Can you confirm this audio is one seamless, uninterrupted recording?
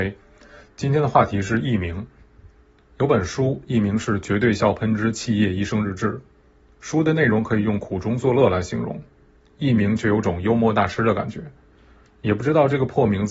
yes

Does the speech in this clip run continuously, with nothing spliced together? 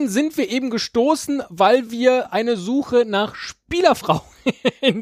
yes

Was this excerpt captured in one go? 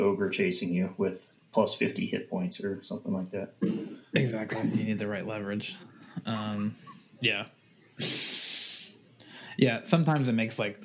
no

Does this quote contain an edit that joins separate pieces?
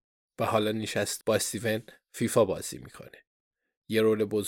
yes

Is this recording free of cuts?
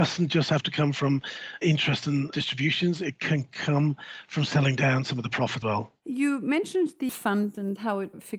no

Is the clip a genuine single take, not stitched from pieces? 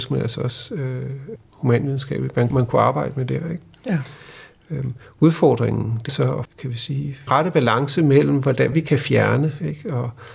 no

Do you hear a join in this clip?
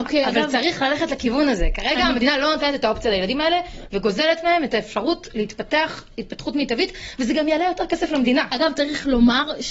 no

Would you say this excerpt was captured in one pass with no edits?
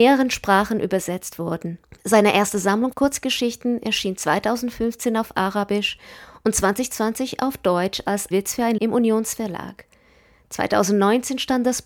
no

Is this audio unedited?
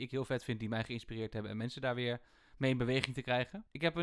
yes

